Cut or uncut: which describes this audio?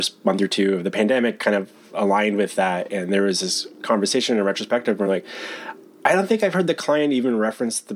uncut